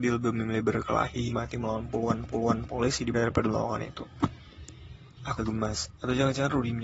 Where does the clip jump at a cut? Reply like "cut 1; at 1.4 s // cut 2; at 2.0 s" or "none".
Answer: cut 1; at 1.3 s // cut 2; at 2.3 s // cut 3; at 3.1 s // cut 4; at 5.4 s